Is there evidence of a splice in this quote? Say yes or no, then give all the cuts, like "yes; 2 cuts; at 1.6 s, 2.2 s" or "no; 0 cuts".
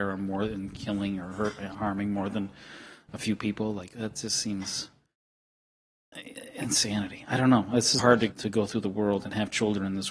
yes; 2 cuts; at 8.0 s, 8.3 s